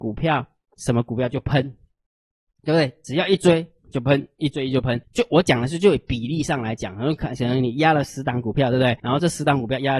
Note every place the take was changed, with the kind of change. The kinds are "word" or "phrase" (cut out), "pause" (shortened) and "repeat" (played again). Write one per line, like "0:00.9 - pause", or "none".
0:05.0 - pause
0:09.0 - pause